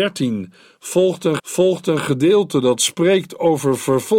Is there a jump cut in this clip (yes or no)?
yes